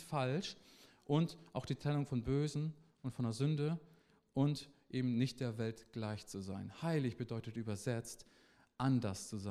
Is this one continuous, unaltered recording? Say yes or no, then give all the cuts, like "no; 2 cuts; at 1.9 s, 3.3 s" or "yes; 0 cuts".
yes; 0 cuts